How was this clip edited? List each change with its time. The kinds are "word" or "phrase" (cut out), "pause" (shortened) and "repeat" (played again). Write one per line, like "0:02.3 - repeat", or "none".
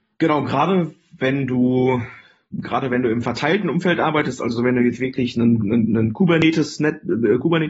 none